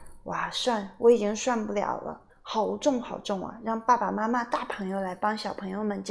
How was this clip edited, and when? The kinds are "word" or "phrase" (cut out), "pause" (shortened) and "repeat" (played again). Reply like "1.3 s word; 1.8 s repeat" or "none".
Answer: 2.3 s pause